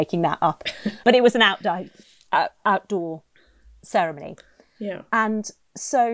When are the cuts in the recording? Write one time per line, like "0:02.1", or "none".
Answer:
0:01.0